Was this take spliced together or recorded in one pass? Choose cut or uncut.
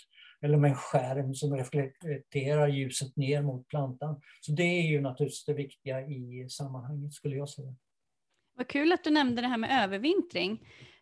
uncut